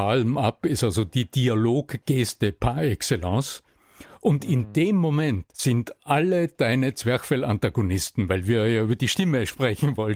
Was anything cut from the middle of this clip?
yes; 1 cut; at 5.5 s

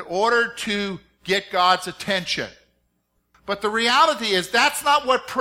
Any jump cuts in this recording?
no; 0 cuts

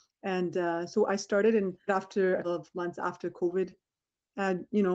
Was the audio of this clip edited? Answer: yes; 2 cuts; at 1.9 s, 2.4 s

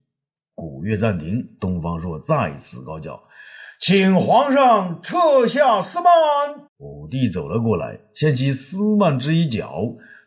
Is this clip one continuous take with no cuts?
no; 1 cut; at 6.7 s

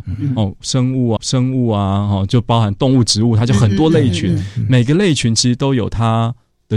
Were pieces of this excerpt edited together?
yes; 1 cut; at 1.2 s

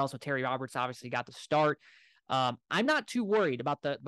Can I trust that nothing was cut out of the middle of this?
yes; 0 cuts

